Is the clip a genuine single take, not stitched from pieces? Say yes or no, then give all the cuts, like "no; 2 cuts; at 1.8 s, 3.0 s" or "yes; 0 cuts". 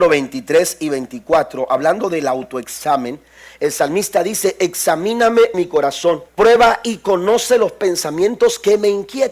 no; 2 cuts; at 5.5 s, 6.3 s